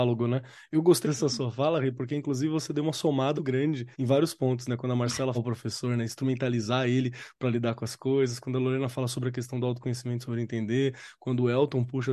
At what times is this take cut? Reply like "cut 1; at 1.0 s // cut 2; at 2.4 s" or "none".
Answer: cut 1; at 1.0 s // cut 2; at 3.4 s // cut 3; at 3.9 s // cut 4; at 5.3 s